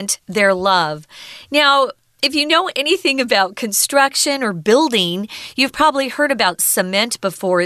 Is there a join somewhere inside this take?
no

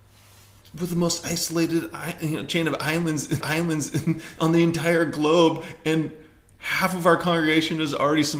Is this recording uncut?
no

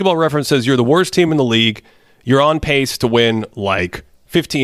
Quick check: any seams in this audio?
no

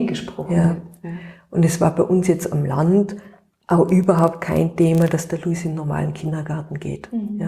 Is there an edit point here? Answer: no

